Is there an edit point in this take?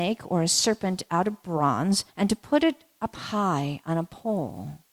yes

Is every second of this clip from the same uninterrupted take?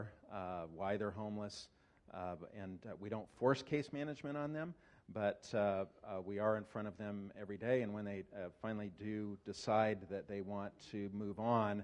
yes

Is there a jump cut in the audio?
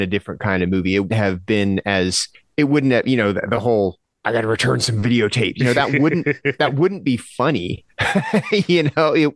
yes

